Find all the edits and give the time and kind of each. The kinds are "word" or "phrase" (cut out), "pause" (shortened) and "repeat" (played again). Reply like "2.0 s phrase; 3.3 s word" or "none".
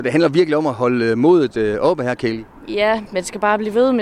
none